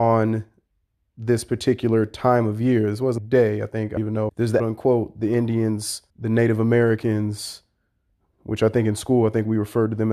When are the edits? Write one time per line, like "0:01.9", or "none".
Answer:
0:03.2
0:04.0
0:04.3
0:04.6
0:06.1